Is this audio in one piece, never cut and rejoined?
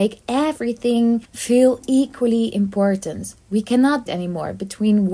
no; 2 cuts; at 1.2 s, 4.1 s

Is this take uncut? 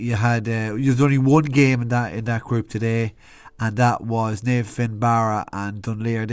yes; 0 cuts

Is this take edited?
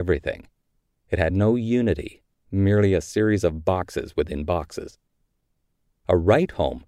no; 0 cuts

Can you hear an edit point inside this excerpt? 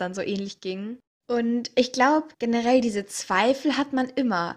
yes; 1 cut; at 2.3 s

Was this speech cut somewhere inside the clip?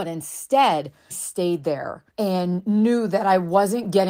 yes; 2 cuts; at 1.1 s, 2.1 s

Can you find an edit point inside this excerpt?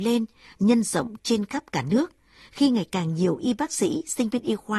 no; 0 cuts

